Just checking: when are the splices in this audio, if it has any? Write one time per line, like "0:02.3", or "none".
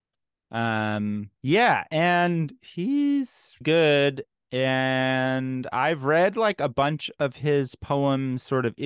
0:01.4
0:03.6